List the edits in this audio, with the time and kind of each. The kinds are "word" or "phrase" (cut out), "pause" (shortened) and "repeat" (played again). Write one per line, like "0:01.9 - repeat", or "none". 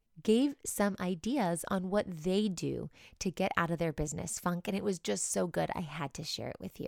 none